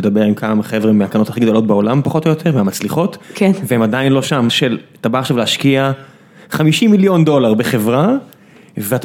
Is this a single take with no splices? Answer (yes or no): no